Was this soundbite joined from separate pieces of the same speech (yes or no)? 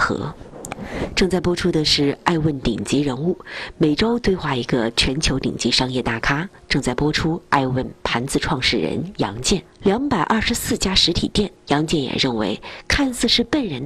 yes